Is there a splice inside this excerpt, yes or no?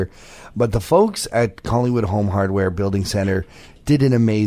no